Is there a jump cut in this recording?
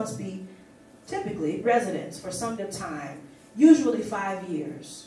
yes; 2 cuts; at 1.6 s, 2.6 s

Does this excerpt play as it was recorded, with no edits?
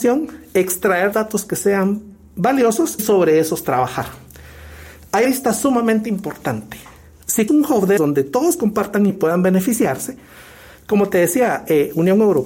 no; 6 cuts; at 1.1 s, 3.0 s, 5.2 s, 7.5 s, 8.0 s, 9.1 s

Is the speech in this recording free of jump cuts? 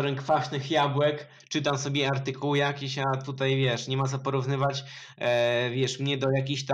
yes; 0 cuts

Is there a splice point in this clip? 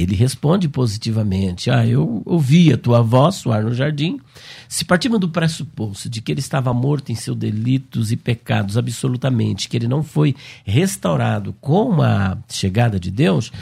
no; 0 cuts

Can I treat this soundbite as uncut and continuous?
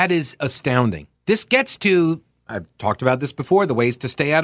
no; 1 cut; at 1.2 s

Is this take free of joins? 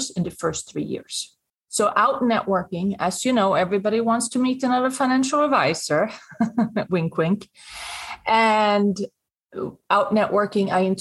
no; 1 cut; at 1.5 s

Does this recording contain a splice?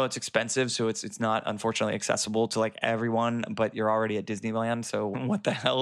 no; 0 cuts

